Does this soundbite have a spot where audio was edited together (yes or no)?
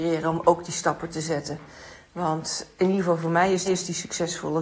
yes